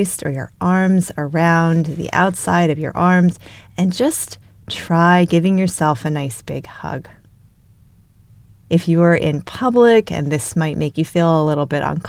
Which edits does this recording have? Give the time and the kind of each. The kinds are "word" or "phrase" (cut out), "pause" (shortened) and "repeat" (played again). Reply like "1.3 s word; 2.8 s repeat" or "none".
none